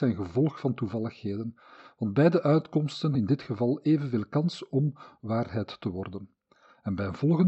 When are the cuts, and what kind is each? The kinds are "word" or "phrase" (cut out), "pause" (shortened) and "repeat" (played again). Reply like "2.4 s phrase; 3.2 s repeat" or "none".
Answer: 3.1 s word